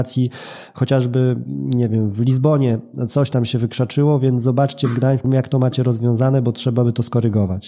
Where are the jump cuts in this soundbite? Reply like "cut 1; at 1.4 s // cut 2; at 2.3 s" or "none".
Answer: cut 1; at 5.2 s